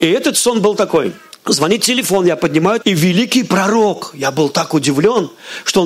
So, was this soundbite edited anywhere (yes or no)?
yes